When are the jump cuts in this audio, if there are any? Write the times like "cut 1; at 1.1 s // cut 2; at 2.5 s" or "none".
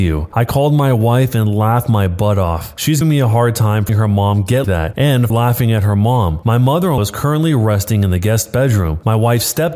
cut 1; at 3.0 s // cut 2; at 3.9 s // cut 3; at 4.6 s // cut 4; at 5.3 s // cut 5; at 7.0 s